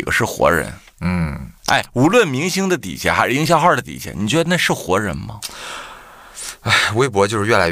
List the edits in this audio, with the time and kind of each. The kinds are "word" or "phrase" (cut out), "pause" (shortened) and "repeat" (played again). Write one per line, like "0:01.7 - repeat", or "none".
0:01.6 - pause